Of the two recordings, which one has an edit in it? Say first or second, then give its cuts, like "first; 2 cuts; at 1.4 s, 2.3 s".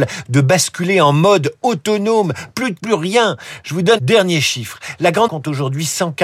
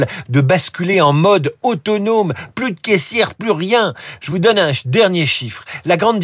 first; 3 cuts; at 2.8 s, 4.0 s, 5.3 s